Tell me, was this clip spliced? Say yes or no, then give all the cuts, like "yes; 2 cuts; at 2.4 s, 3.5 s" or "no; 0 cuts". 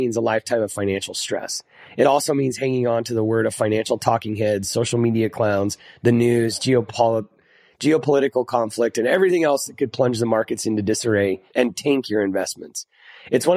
no; 0 cuts